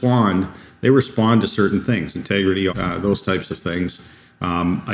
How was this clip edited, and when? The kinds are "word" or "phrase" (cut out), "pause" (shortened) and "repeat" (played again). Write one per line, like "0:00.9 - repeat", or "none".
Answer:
0:02.7 - phrase